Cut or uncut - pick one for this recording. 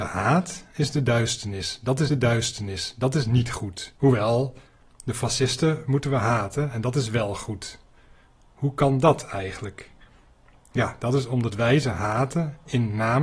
cut